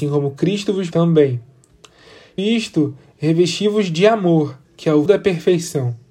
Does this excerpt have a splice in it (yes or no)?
yes